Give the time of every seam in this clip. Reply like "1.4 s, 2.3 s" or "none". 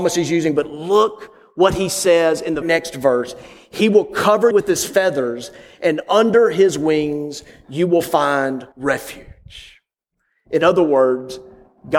2.6 s, 4.5 s, 8.7 s